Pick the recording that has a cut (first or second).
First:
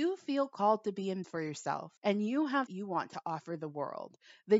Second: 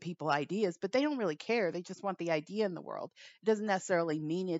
first